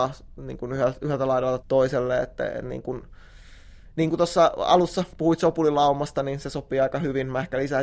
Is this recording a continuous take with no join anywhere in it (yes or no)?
no